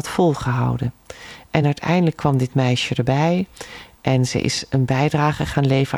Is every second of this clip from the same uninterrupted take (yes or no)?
yes